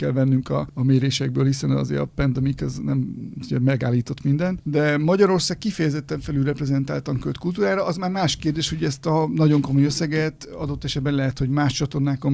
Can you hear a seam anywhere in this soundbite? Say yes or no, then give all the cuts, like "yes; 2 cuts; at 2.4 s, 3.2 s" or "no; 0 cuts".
no; 0 cuts